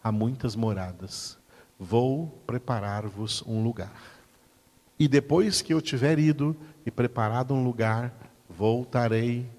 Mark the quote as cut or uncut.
uncut